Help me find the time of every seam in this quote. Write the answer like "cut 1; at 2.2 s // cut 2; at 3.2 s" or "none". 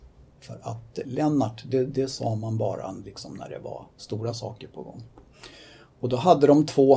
cut 1; at 3.9 s